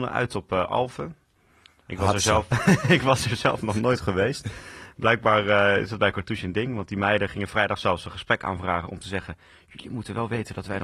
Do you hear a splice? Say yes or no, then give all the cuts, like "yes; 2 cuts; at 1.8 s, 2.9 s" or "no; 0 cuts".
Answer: yes; 1 cut; at 2.5 s